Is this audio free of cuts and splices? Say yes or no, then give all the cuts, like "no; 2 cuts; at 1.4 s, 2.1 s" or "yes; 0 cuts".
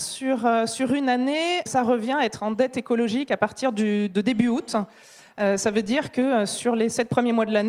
no; 1 cut; at 1.7 s